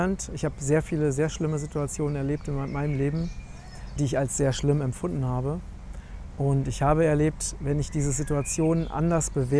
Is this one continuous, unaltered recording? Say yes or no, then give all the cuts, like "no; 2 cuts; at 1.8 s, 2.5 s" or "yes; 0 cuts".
no; 1 cut; at 4.0 s